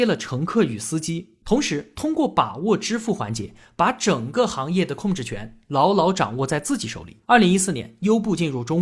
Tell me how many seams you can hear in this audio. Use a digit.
1